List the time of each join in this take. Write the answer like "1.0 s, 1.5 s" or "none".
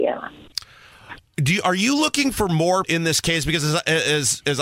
2.8 s